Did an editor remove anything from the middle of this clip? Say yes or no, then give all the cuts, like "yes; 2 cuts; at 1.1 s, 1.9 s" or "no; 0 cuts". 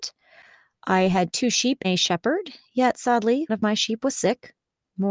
yes; 2 cuts; at 1.8 s, 3.5 s